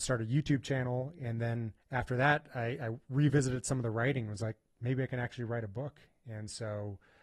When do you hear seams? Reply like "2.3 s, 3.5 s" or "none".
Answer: 1.8 s